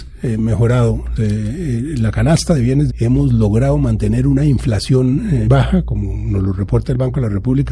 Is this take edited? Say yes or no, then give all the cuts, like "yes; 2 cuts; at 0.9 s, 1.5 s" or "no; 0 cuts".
yes; 3 cuts; at 1.2 s, 2.9 s, 5.5 s